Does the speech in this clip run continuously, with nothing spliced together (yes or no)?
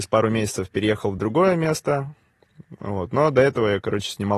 yes